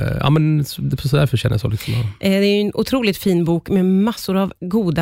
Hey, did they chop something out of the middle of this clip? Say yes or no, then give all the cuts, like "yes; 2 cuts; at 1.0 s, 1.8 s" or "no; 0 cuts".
no; 0 cuts